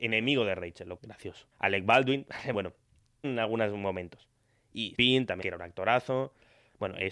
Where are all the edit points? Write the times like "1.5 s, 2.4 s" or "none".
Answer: 1.0 s, 1.5 s, 2.5 s, 3.2 s, 4.9 s, 5.4 s